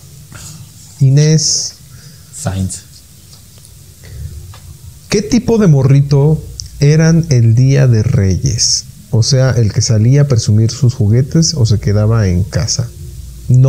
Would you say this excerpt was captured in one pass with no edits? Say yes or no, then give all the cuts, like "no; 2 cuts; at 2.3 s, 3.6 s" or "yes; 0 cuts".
yes; 0 cuts